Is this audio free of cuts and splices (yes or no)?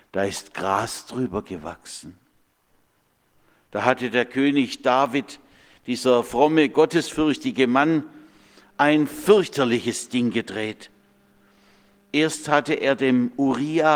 yes